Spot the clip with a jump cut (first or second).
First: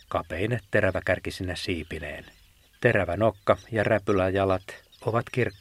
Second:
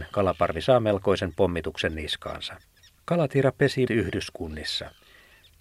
second